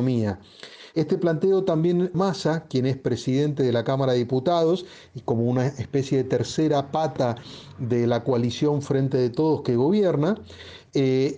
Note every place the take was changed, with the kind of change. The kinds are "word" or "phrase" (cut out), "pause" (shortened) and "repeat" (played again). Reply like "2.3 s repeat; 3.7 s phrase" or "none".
2.1 s phrase